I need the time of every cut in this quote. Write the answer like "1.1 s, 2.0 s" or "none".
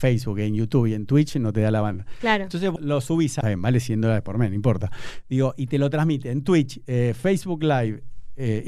2.8 s, 3.4 s